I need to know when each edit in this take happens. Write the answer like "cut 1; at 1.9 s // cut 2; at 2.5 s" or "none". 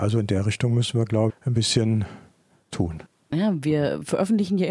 cut 1; at 1.3 s // cut 2; at 2.7 s